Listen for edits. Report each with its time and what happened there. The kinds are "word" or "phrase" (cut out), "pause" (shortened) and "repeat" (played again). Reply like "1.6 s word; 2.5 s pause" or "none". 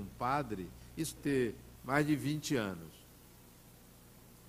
1.2 s word; 1.8 s pause